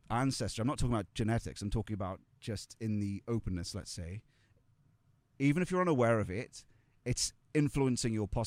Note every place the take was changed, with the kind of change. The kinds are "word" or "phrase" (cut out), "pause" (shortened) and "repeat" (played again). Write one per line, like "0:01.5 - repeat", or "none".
none